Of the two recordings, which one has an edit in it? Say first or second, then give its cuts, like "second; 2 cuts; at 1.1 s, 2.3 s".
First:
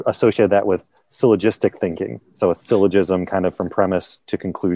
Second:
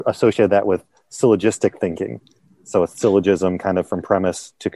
first; 1 cut; at 2.2 s